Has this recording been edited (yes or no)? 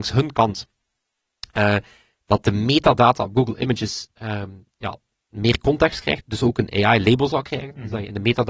no